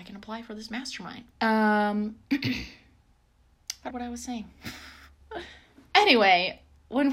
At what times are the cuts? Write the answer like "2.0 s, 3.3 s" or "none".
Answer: 1.3 s, 3.9 s

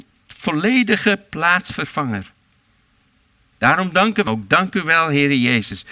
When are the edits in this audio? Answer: 4.3 s

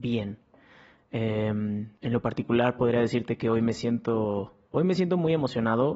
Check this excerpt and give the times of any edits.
2.0 s

